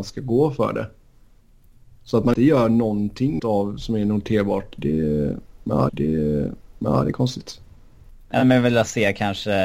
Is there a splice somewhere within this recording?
yes; 3 cuts; at 2.4 s, 3.4 s, 5.9 s

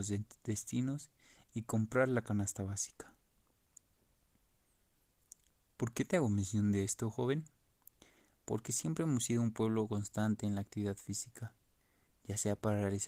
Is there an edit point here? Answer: no; 0 cuts

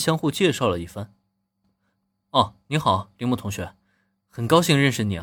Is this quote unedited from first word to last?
yes; 0 cuts

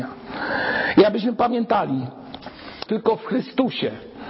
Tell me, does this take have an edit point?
yes; 1 cut; at 2.9 s

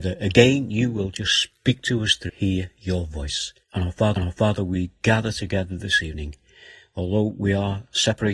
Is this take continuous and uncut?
no; 3 cuts; at 2.3 s, 3.6 s, 4.2 s

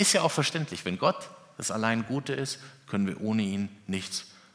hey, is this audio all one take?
yes; 0 cuts

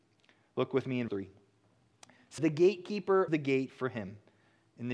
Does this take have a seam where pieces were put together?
yes; 3 cuts; at 1.1 s, 2.4 s, 3.3 s

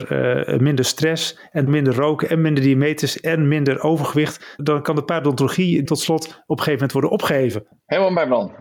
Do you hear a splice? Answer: yes; 3 cuts; at 1.7 s, 4.6 s, 5.8 s

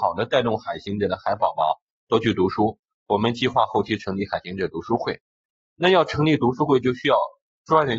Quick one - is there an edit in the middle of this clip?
no; 0 cuts

